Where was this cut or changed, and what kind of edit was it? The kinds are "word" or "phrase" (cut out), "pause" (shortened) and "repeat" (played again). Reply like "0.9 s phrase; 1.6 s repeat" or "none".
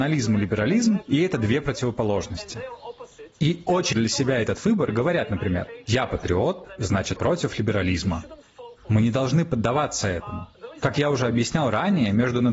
3.3 s pause; 3.9 s phrase; 7.2 s word

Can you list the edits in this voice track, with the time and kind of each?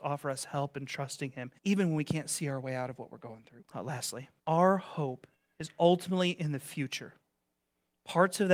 1.6 s pause; 3.7 s pause; 4.4 s pause; 5.3 s pause

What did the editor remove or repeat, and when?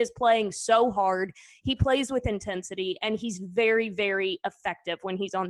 none

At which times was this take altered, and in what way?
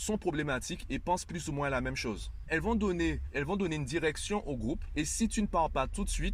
none

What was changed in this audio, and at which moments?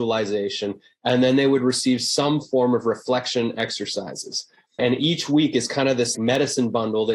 4.8 s word; 6.1 s word

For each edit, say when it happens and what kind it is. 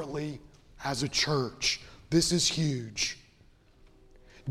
none

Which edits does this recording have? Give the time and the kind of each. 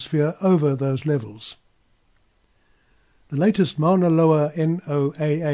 none

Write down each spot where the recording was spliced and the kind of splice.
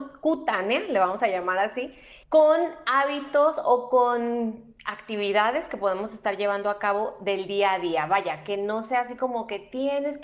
2.2 s pause

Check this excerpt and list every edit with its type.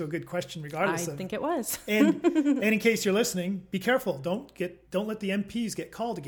4.8 s pause

